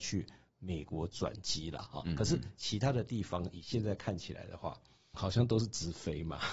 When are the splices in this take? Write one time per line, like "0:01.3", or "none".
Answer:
0:05.1